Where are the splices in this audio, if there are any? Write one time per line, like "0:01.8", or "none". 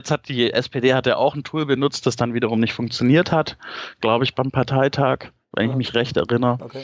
none